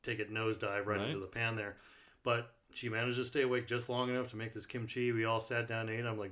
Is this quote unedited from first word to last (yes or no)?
yes